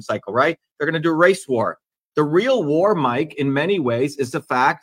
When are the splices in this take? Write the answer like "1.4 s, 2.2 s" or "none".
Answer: none